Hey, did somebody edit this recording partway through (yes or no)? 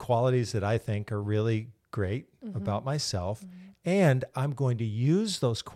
no